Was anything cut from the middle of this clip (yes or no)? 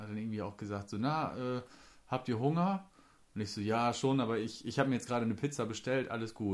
no